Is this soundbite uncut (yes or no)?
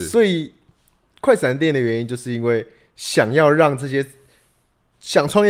yes